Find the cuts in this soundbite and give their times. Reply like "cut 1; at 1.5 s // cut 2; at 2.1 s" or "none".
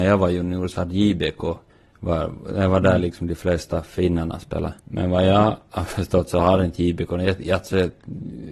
cut 1; at 1.7 s // cut 2; at 4.8 s